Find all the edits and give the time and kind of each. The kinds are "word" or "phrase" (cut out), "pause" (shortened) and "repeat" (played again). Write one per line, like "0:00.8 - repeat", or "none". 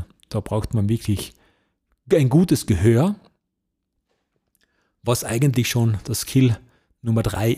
none